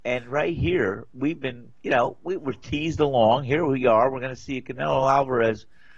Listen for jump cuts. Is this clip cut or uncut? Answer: uncut